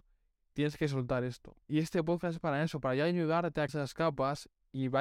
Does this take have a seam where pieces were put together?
yes; 2 cuts; at 1.6 s, 3.7 s

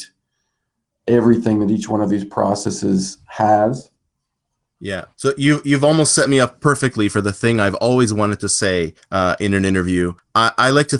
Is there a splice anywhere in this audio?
yes; 1 cut; at 5.1 s

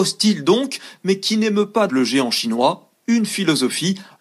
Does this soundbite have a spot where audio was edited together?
yes; 1 cut; at 1.9 s

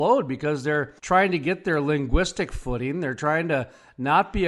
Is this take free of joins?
no; 1 cut; at 1.0 s

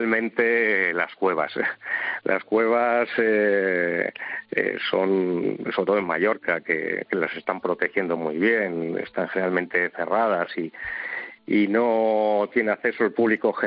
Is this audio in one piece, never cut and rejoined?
yes; 0 cuts

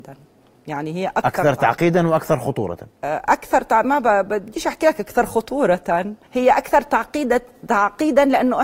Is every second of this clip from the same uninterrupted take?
no; 1 cut; at 6.2 s

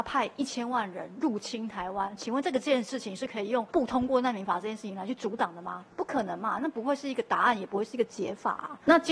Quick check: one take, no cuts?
no; 2 cuts; at 3.7 s, 5.9 s

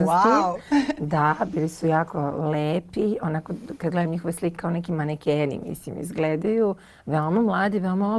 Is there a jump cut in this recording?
yes; 1 cut; at 4.5 s

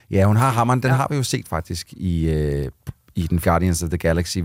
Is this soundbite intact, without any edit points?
no; 2 cuts; at 1.4 s, 3.4 s

